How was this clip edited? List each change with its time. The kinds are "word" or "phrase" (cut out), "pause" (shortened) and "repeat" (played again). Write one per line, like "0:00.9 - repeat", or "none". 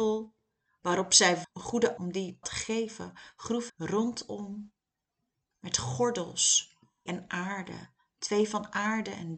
0:01.4 - word
0:02.0 - word
0:02.4 - word
0:03.7 - word
0:07.1 - word